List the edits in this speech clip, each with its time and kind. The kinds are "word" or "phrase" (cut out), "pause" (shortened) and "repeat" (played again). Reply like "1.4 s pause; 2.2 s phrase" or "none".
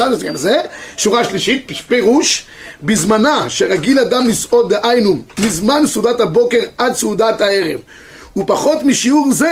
none